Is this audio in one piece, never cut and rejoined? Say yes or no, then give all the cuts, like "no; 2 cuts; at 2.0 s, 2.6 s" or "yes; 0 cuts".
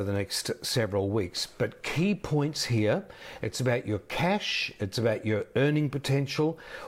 yes; 0 cuts